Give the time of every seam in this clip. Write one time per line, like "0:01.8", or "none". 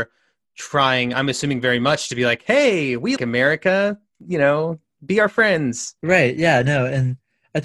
0:03.2
0:06.0

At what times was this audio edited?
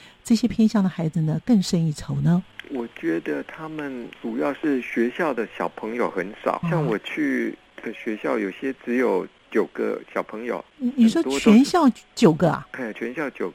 0:04.1
0:06.6

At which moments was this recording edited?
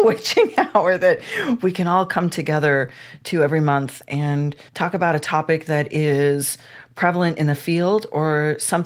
0:04.7

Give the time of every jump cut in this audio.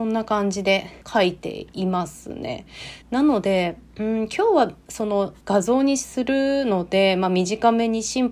0:01.0
0:03.0
0:05.4

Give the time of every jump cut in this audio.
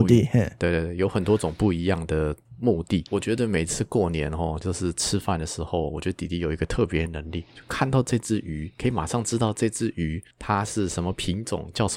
0:02.4
0:03.1
0:07.5
0:10.3

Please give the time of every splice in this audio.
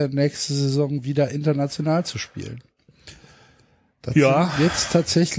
none

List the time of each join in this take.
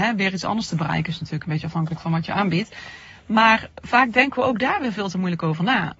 none

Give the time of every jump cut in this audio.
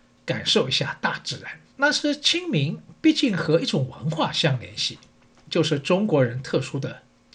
0:01.7

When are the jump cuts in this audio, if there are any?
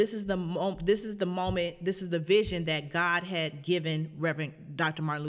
none

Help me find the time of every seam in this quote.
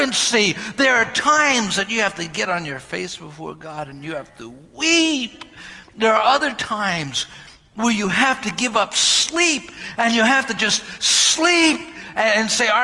none

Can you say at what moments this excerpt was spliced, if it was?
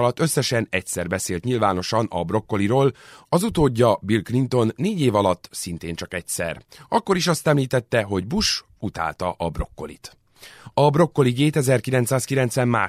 none

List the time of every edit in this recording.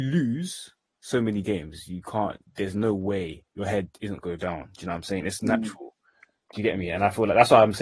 0:03.5
0:04.2

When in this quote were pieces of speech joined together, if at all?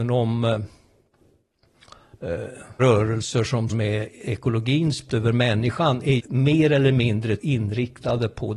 0:02.8
0:03.7
0:05.1
0:06.2
0:07.4

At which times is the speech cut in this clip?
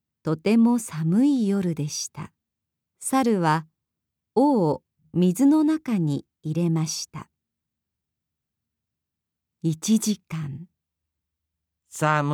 0:02.7

